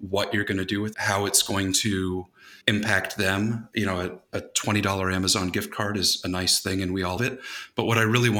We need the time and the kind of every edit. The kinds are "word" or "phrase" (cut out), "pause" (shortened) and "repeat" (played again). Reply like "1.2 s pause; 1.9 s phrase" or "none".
0.9 s word; 2.6 s pause; 7.2 s word